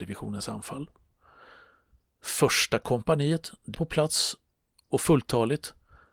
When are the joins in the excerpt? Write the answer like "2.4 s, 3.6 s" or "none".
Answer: 3.7 s